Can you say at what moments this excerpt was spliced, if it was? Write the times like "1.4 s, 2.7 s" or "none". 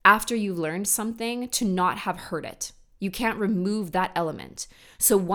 none